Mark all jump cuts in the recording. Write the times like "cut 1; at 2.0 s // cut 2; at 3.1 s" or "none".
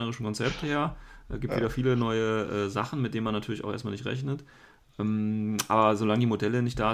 none